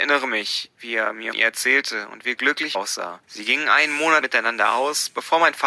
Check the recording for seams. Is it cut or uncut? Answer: cut